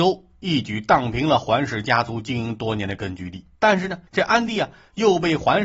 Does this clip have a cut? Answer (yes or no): yes